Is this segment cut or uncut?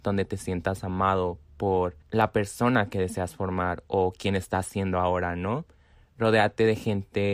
cut